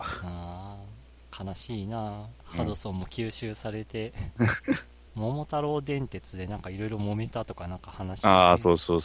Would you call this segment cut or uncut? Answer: uncut